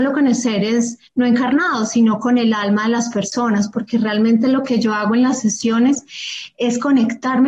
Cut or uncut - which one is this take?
cut